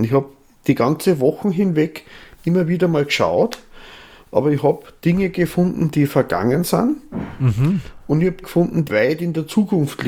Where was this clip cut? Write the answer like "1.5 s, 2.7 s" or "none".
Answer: 8.4 s, 8.9 s